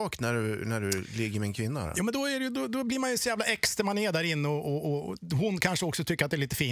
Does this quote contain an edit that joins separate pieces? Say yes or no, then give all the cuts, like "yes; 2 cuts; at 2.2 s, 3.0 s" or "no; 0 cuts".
no; 0 cuts